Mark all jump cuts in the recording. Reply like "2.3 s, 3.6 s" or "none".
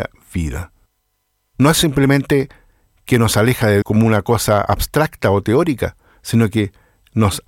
3.8 s